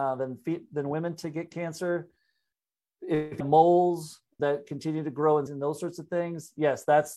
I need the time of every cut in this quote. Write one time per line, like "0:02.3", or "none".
0:01.5
0:03.4
0:04.4
0:05.5